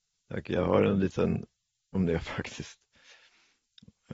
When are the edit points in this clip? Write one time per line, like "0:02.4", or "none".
0:01.9

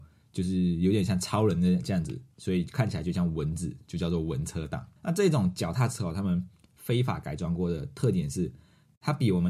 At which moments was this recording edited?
0:05.0

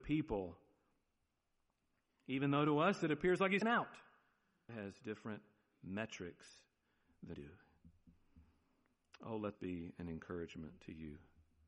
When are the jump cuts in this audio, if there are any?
0:03.6
0:04.7
0:07.3
0:09.5

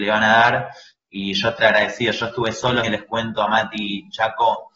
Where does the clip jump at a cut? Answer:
0:01.6
0:02.8

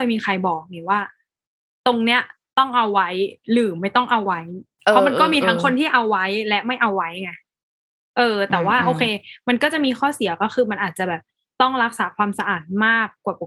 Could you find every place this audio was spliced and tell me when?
none

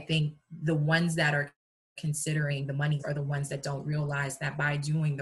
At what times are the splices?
0:03.0

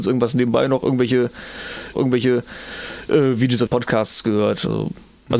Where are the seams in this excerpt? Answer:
0:01.9
0:03.7

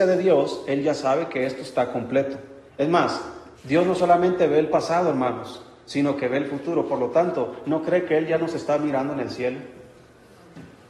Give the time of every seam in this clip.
0:02.7
0:03.5

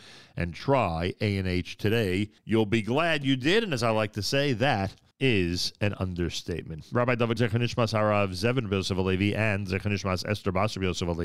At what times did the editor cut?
0:02.4
0:05.1
0:07.4

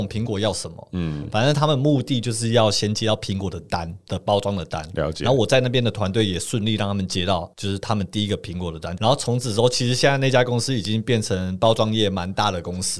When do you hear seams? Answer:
0:07.5

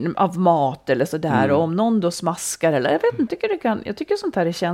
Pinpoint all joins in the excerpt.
0:03.3

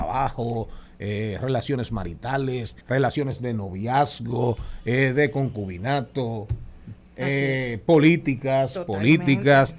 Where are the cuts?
0:02.8

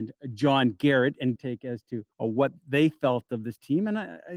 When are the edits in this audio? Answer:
0:01.4
0:02.1

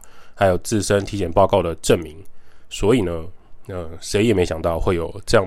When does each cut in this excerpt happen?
none

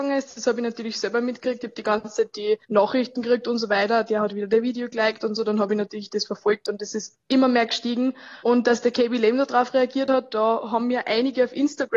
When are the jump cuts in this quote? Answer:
0:02.6
0:08.4

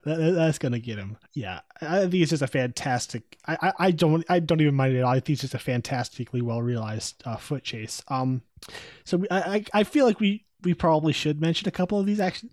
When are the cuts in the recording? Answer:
0:01.3
0:10.5

